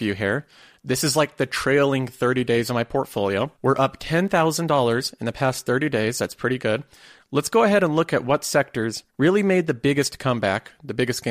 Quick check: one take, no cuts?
no; 2 cuts; at 3.6 s, 9.1 s

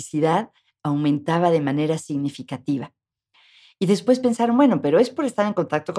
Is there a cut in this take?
no; 0 cuts

